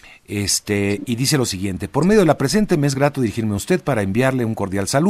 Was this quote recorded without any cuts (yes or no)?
yes